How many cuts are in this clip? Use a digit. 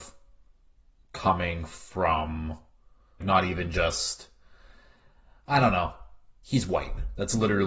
1